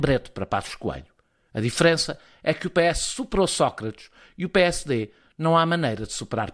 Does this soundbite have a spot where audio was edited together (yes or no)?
no